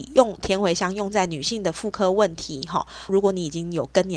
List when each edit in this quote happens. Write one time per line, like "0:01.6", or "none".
0:03.1